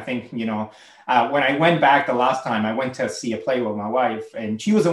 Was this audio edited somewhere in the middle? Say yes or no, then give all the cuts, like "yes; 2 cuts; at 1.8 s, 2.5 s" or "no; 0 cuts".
no; 0 cuts